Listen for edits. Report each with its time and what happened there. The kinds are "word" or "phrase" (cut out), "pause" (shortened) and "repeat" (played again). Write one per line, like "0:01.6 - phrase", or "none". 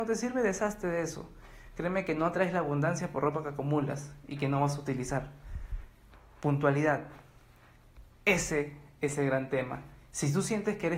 none